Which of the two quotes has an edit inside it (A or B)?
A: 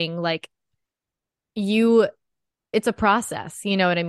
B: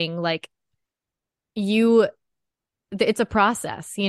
A